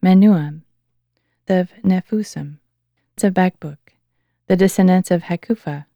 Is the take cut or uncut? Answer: cut